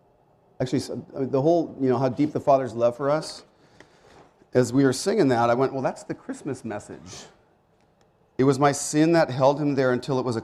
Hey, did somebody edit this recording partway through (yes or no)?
no